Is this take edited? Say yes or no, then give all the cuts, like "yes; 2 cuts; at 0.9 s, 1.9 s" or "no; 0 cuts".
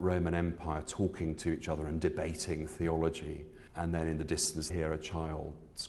yes; 2 cuts; at 3.7 s, 4.7 s